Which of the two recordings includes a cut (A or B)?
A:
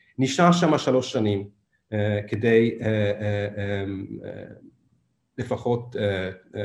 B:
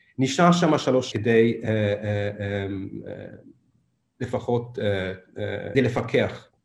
B